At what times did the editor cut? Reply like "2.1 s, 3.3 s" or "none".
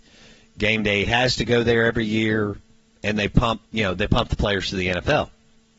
2.8 s, 3.7 s